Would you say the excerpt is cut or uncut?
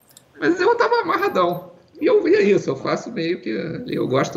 uncut